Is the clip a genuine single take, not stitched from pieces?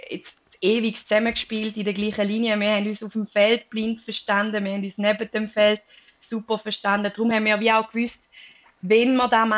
yes; 0 cuts

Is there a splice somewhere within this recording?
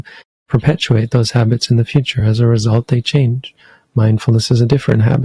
no; 0 cuts

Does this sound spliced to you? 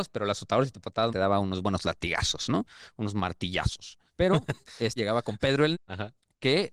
yes; 4 cuts; at 1.1 s, 4.1 s, 5.0 s, 5.7 s

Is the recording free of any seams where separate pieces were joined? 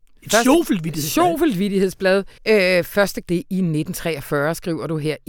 no; 2 cuts; at 2.4 s, 3.2 s

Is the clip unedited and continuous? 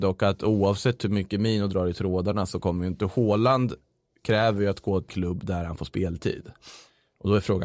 no; 1 cut; at 5.1 s

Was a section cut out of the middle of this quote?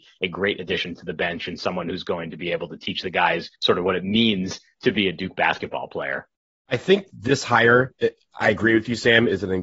yes; 2 cuts; at 3.5 s, 6.3 s

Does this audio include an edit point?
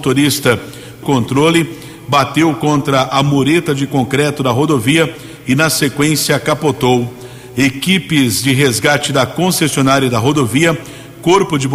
yes; 1 cut; at 1.0 s

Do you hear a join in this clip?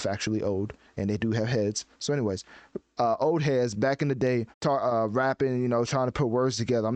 yes; 1 cut; at 4.5 s

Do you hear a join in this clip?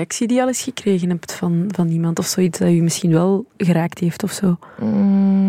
no; 0 cuts

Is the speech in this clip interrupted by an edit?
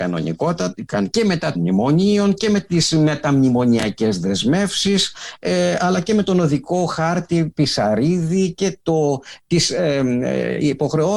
yes; 2 cuts; at 1.1 s, 1.5 s

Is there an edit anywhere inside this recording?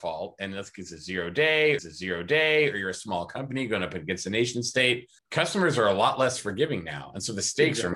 yes; 2 cuts; at 1.8 s, 5.2 s

